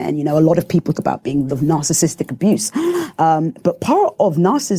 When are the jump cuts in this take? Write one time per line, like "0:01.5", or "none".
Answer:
0:00.9
0:01.5